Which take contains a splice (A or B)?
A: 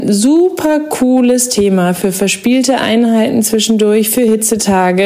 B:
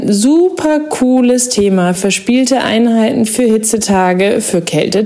B